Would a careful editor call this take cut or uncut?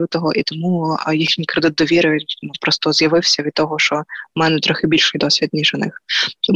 uncut